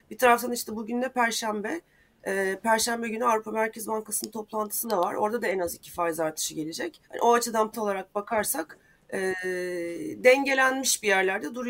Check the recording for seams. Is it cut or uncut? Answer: cut